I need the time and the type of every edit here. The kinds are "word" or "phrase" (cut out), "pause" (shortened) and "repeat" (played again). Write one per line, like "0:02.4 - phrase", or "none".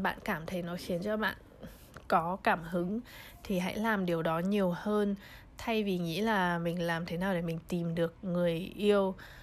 none

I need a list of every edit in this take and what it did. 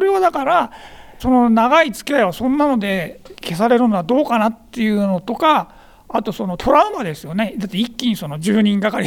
0:01.2 - word

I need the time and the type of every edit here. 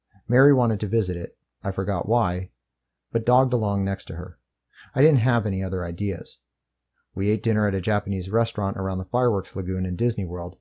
0:04.5 - pause

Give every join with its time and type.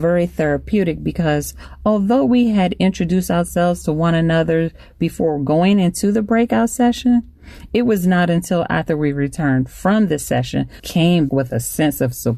0:10.8 - word
0:11.3 - word

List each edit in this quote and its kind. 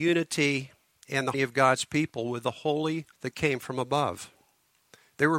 0:01.3 - word
0:03.1 - word

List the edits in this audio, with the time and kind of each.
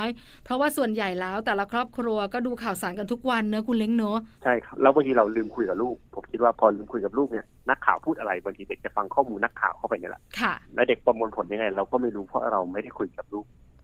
0:04.3 - pause
0:10.3 - pause
0:10.6 - pause

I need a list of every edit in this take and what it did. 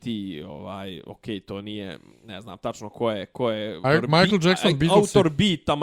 0:02.1 - pause
0:03.8 - word

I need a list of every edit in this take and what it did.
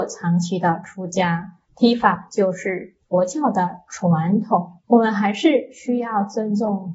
0:01.7 - pause
0:04.8 - pause

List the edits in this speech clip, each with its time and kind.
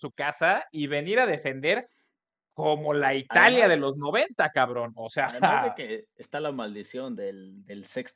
none

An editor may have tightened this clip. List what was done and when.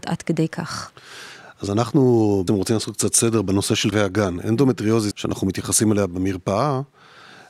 0:02.5 - word
0:03.9 - word
0:05.1 - phrase

